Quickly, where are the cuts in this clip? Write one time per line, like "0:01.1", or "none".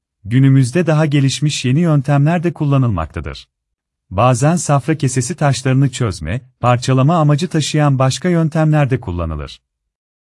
0:03.7